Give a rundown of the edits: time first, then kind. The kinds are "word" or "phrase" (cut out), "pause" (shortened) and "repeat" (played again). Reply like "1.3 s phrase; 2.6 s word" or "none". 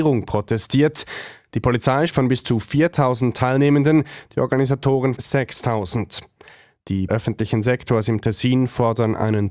2.1 s word; 5.2 s word; 7.1 s phrase